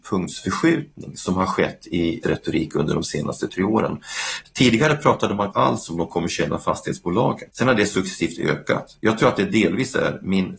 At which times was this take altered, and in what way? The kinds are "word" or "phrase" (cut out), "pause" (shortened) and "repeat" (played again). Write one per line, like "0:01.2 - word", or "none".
0:02.2 - word
0:03.5 - word
0:05.5 - word
0:07.5 - pause